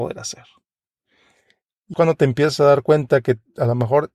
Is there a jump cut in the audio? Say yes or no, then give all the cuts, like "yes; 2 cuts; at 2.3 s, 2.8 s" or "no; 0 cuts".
yes; 1 cut; at 1.9 s